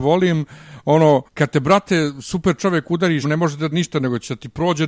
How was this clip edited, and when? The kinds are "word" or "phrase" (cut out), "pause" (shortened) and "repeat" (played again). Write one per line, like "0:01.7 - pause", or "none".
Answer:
0:01.3 - pause
0:03.2 - word
0:03.7 - phrase